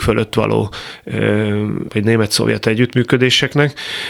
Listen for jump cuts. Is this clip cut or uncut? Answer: cut